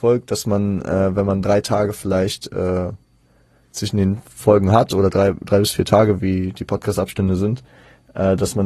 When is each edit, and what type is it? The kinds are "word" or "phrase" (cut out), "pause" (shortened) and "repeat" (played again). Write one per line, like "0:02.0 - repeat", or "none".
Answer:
none